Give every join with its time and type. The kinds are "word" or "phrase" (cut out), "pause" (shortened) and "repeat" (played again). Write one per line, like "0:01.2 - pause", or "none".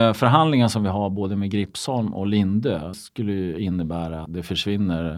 0:02.9 - word
0:04.3 - word